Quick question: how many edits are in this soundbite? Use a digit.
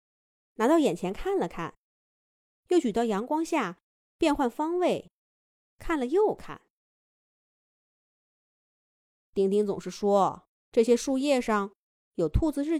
0